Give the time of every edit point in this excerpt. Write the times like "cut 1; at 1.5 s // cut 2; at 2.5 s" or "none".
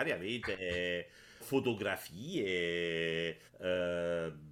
cut 1; at 1.4 s // cut 2; at 3.5 s